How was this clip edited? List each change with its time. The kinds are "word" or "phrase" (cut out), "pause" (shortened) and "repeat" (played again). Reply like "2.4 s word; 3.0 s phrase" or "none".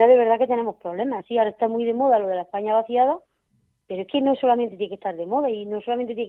none

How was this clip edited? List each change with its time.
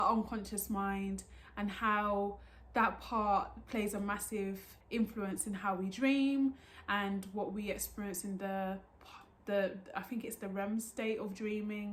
4.8 s pause

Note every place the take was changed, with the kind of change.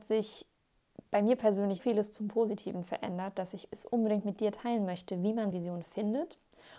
1.8 s word; 5.5 s word

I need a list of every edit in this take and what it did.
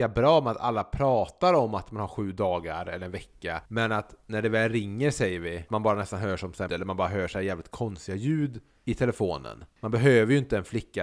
5.7 s word; 6.7 s word

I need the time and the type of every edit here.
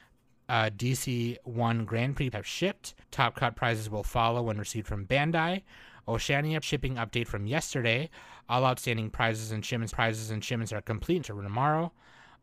2.3 s word; 3.0 s pause; 6.6 s word; 9.9 s repeat; 11.2 s phrase

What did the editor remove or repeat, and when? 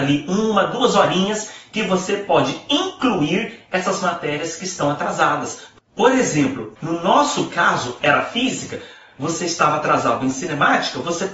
none

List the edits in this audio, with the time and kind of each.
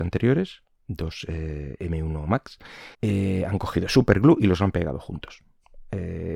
2.9 s pause

